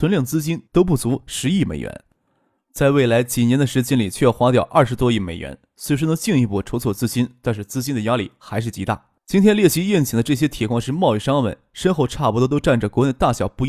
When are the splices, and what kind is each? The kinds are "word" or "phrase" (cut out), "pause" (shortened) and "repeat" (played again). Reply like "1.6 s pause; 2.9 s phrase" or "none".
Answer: 9.2 s pause